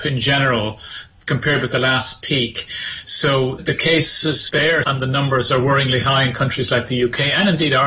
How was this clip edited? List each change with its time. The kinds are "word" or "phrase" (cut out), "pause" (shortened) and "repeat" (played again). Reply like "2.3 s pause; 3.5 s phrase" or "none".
3.6 s word; 4.5 s word; 4.8 s word